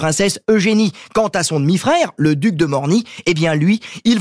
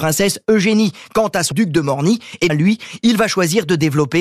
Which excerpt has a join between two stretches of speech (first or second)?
second